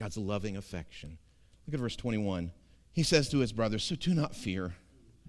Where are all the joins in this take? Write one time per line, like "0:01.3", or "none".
0:02.7

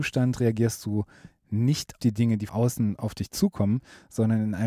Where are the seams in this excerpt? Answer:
0:02.0
0:02.5

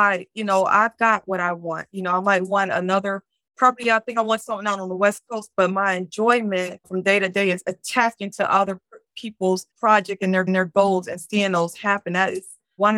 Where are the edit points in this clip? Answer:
0:06.8
0:07.6
0:09.7
0:10.5

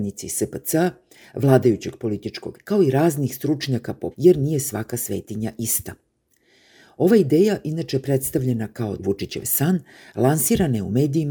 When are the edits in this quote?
0:02.5
0:04.1
0:09.0

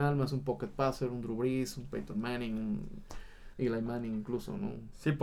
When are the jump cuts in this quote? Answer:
0:03.5

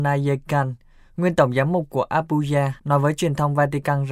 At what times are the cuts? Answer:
0:02.8

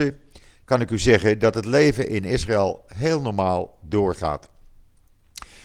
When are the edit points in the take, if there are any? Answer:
none

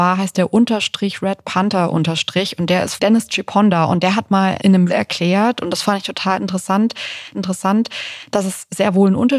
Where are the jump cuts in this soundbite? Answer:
0:03.0
0:04.6
0:04.9
0:07.3

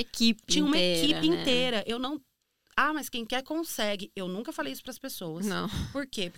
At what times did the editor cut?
none

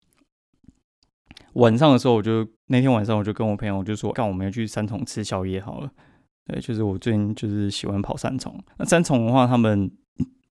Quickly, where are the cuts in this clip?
0:02.5
0:04.1
0:06.0
0:08.7

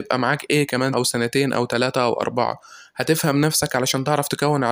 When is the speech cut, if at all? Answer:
0:00.9

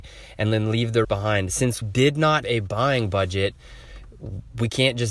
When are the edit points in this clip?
0:01.0
0:01.8
0:02.4

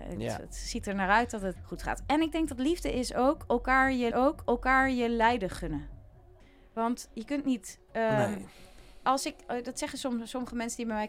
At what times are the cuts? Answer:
0:01.6
0:04.1
0:06.4

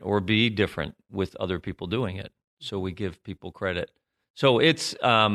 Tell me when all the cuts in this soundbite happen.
none

